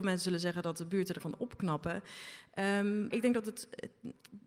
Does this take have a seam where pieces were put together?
yes; 2 cuts; at 1.2 s, 3.1 s

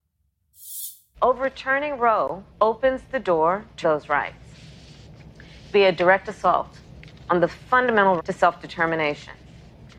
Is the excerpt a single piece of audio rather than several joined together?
no; 4 cuts; at 2.5 s, 3.8 s, 5.7 s, 8.2 s

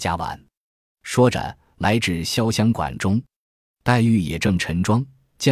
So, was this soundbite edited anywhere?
no; 0 cuts

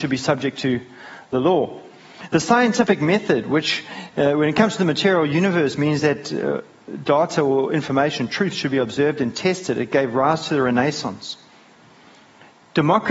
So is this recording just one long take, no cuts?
yes; 0 cuts

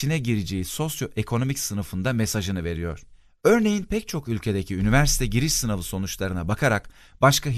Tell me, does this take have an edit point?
no; 0 cuts

